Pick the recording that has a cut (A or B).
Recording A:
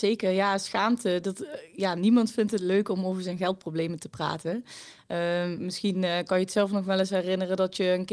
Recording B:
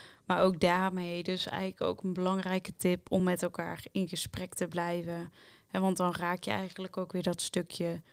A